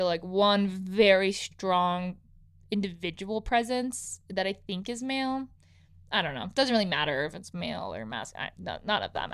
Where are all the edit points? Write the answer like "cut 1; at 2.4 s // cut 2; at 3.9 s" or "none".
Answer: none